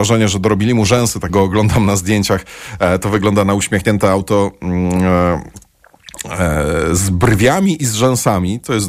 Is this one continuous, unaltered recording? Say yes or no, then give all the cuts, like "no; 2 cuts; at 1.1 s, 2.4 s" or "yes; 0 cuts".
no; 1 cut; at 1.3 s